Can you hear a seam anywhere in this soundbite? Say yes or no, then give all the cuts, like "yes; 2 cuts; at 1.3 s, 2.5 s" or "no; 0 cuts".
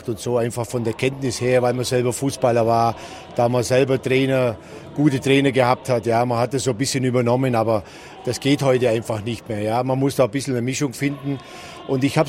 no; 0 cuts